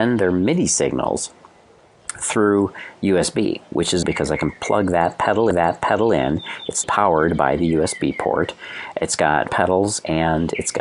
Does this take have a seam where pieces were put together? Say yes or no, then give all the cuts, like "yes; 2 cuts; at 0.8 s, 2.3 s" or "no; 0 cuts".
yes; 4 cuts; at 4.0 s, 5.5 s, 6.8 s, 9.5 s